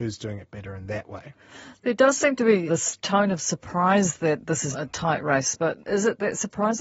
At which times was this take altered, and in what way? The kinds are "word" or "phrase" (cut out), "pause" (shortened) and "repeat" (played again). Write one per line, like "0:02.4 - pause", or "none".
0:02.7 - word
0:04.7 - word
0:05.8 - pause